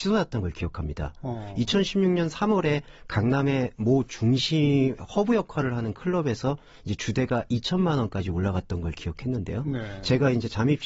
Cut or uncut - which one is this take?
uncut